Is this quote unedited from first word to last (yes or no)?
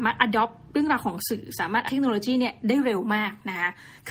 no